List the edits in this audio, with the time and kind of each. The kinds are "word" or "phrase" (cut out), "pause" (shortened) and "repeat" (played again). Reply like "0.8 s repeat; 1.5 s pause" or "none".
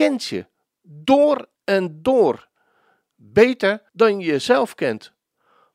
1.5 s pause; 3.9 s pause